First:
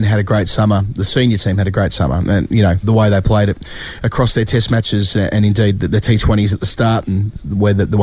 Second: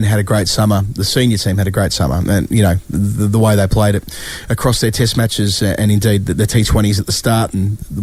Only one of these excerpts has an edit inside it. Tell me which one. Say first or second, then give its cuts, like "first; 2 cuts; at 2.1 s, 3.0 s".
first; 1 cut; at 2.8 s